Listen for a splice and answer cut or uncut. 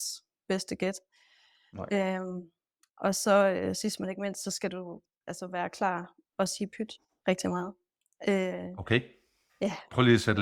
cut